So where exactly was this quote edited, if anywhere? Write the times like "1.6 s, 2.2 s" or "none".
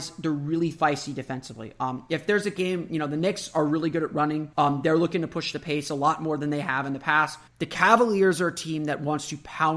4.5 s, 7.5 s